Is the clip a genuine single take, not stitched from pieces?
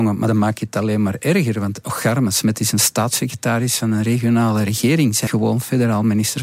no; 1 cut; at 5.3 s

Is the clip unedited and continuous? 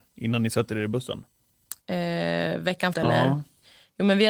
no; 1 cut; at 2.9 s

